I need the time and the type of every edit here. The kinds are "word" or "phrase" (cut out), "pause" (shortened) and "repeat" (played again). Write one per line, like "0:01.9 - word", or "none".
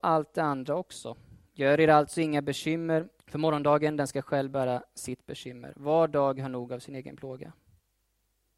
0:03.2 - pause